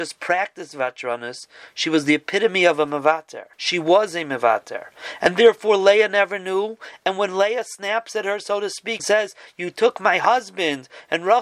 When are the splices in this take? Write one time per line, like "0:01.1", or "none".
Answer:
0:03.5
0:09.0